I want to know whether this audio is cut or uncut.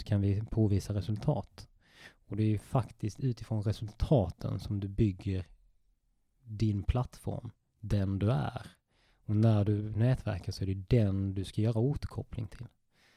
uncut